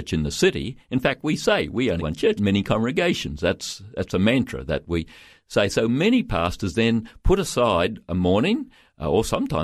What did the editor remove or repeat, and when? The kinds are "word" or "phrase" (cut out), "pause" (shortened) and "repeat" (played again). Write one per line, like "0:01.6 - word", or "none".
0:02.0 - word
0:02.4 - phrase

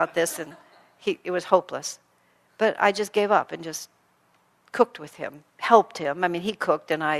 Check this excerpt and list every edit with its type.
none

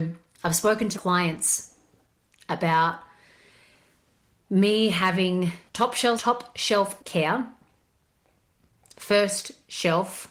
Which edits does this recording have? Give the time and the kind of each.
0:00.9 - word
0:05.7 - pause
0:06.2 - word
0:07.0 - word

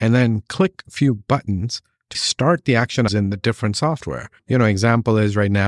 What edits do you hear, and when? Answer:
0:02.1 - word
0:03.1 - word
0:04.4 - pause

